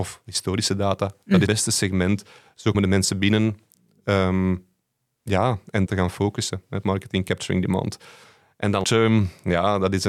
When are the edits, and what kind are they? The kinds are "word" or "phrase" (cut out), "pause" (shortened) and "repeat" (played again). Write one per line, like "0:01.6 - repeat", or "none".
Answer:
0:01.5 - word
0:02.7 - word
0:05.9 - word
0:06.8 - word
0:08.8 - word

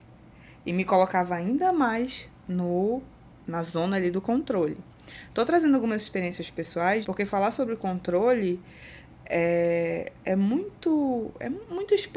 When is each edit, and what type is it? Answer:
0:07.0 - word

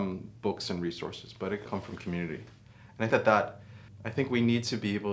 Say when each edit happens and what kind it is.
0:01.7 - word
0:03.1 - word
0:03.9 - word

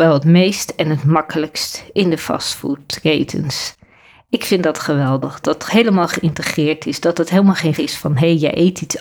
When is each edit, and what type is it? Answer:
0:05.4 - word
0:07.8 - word

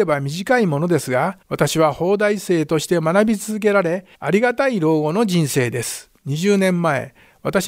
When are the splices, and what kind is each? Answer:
0:01.4 - pause
0:04.1 - pause
0:06.2 - pause

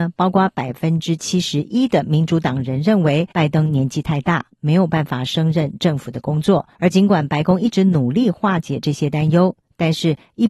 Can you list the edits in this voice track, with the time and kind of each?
0:03.3 - pause
0:06.7 - pause

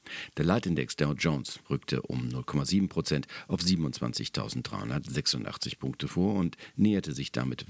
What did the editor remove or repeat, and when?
none

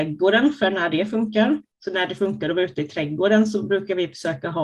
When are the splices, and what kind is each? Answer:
0:01.7 - pause

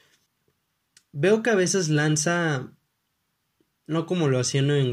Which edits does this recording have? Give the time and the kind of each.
none

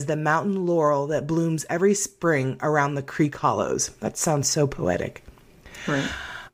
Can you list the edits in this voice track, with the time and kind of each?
none

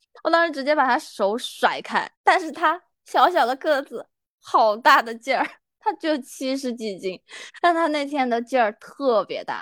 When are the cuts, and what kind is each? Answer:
0:02.1 - pause

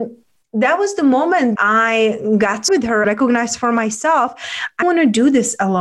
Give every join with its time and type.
0:01.6 - word
0:02.7 - word
0:03.0 - word
0:04.8 - word

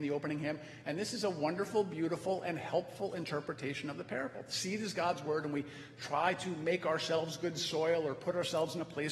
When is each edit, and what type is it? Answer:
none

